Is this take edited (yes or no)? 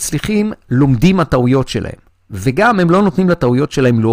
no